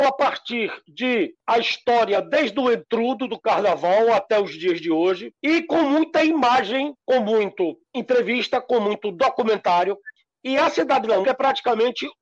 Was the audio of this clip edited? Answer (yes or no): yes